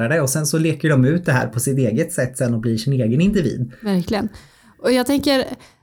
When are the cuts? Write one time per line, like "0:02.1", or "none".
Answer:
none